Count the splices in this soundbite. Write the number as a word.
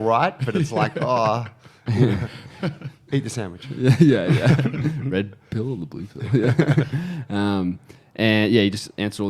zero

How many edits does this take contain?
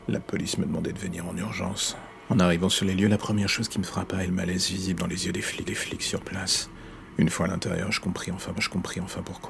three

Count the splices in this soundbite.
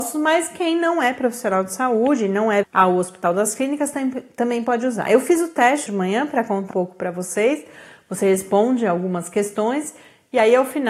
three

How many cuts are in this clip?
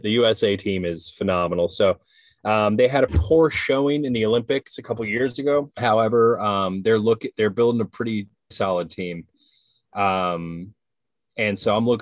three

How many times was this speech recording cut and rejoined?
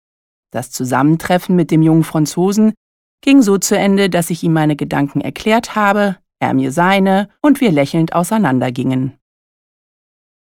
one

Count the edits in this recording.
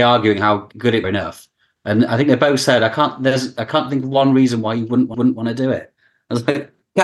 two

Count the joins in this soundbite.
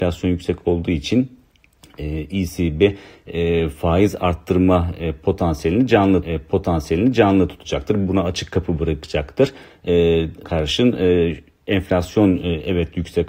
two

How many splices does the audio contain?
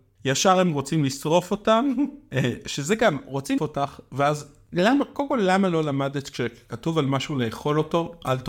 one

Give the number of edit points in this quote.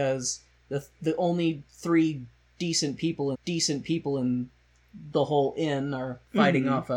one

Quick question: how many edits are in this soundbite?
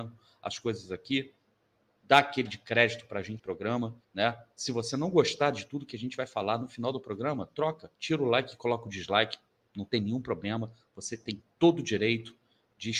four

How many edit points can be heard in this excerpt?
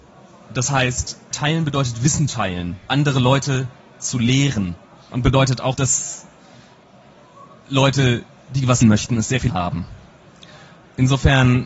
eight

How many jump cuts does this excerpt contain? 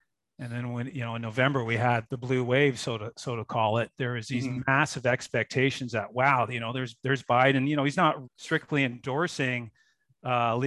two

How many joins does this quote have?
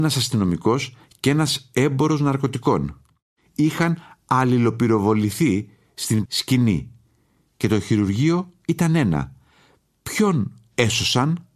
one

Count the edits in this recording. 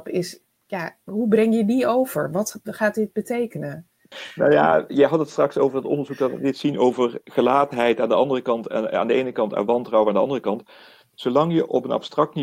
zero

